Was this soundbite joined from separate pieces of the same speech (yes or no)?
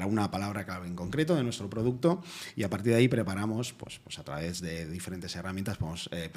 no